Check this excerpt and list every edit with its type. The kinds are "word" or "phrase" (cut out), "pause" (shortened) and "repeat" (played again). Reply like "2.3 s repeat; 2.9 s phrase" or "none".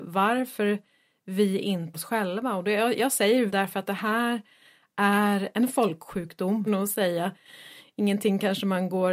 1.9 s word; 3.5 s word; 5.5 s word; 6.7 s phrase

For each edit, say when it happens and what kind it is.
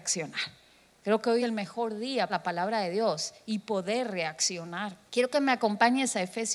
1.4 s word; 2.3 s phrase; 5.1 s pause

